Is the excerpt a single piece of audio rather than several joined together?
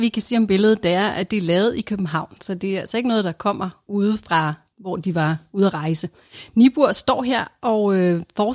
yes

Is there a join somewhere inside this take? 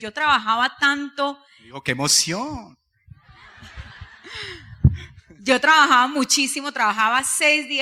no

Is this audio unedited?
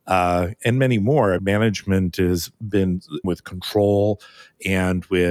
no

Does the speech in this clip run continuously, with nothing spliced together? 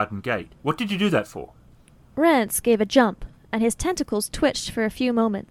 yes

